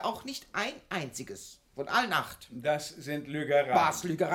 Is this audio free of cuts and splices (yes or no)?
yes